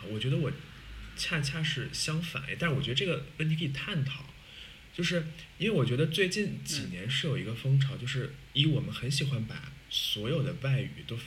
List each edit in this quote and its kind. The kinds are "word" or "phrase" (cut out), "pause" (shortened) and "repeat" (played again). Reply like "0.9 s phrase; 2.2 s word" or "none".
9.8 s pause